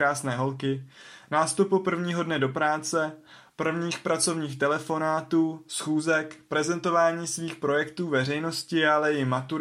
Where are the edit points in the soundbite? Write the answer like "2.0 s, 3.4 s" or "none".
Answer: none